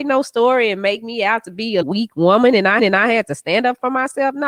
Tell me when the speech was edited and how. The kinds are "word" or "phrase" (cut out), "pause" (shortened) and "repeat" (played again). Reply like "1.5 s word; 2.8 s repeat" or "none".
1.8 s word; 2.8 s repeat